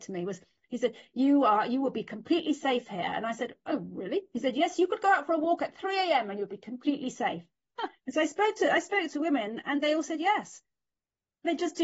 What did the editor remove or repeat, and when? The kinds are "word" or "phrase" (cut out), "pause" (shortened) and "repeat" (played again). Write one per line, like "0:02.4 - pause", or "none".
0:08.0 - pause